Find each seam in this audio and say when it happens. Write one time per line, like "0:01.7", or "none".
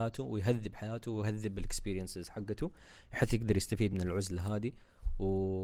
none